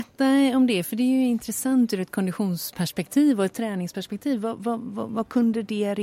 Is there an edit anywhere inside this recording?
no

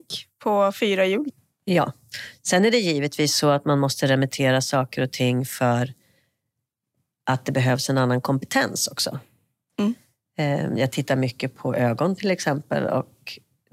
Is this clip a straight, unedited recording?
yes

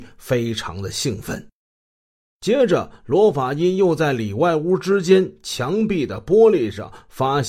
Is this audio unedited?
yes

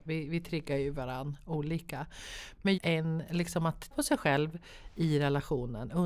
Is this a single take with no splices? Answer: no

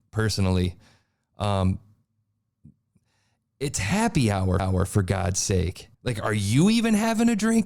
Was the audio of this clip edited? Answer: yes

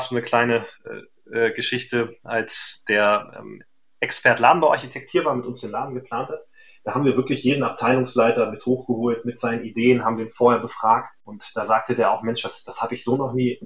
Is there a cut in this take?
no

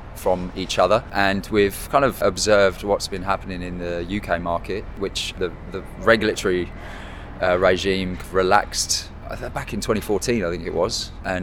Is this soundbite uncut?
yes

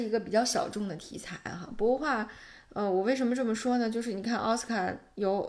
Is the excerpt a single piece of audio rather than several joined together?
yes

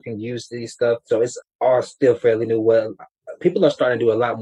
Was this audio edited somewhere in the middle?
no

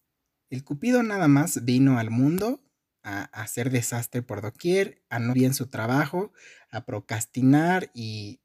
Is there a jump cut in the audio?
yes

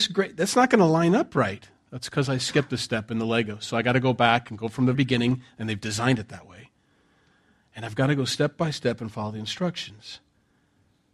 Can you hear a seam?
yes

